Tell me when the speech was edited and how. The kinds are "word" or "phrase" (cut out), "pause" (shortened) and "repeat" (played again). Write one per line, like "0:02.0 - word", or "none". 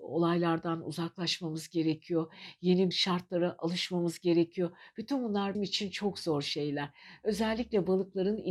0:02.9 - word
0:05.5 - word